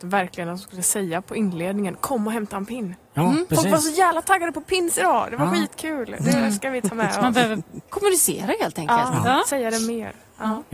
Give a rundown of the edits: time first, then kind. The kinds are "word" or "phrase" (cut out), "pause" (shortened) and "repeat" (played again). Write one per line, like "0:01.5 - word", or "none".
none